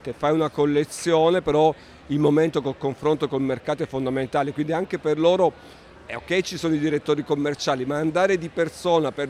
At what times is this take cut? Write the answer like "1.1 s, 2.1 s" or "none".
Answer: none